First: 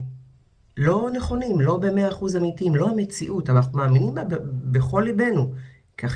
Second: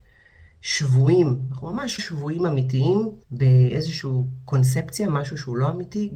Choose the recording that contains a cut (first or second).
second